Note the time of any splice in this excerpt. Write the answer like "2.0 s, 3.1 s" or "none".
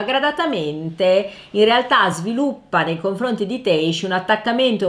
none